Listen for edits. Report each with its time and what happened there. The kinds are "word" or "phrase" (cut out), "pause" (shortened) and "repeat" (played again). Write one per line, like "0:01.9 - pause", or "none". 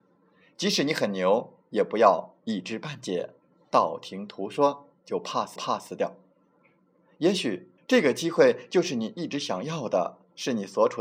0:05.6 - repeat
0:07.8 - pause